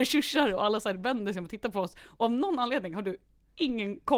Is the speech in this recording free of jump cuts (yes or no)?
yes